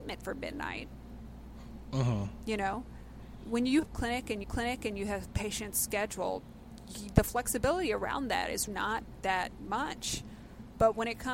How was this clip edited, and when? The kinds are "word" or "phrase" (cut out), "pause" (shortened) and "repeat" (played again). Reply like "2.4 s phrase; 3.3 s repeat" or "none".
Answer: 3.8 s phrase; 4.4 s repeat; 8.7 s word